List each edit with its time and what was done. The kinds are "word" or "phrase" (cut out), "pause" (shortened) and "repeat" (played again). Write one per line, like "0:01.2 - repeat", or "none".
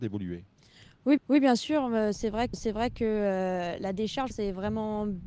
0:01.2 - repeat
0:02.5 - repeat
0:04.3 - phrase